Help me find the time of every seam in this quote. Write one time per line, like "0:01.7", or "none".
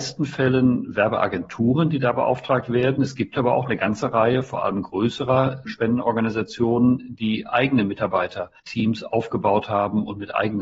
0:05.7
0:08.6